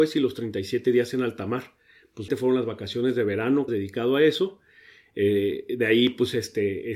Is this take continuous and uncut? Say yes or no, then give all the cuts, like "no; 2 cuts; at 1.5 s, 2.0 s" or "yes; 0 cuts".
no; 2 cuts; at 2.3 s, 3.7 s